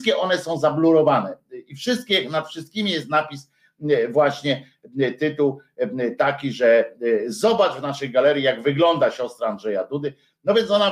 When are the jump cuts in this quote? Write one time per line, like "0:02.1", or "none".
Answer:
none